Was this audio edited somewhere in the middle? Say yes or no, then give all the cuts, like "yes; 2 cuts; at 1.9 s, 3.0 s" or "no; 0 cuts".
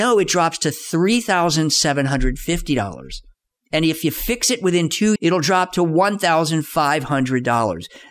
yes; 1 cut; at 5.2 s